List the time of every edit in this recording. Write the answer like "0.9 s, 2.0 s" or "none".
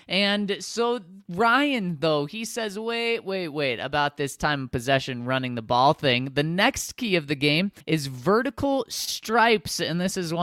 7.8 s